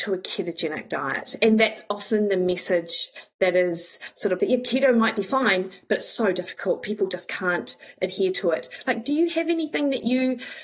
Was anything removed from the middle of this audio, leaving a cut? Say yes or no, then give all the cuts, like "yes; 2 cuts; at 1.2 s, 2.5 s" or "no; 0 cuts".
yes; 1 cut; at 4.4 s